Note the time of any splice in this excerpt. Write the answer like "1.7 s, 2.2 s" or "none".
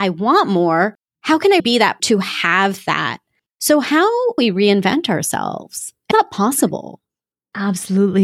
1.1 s, 1.6 s, 2.0 s, 4.4 s, 6.1 s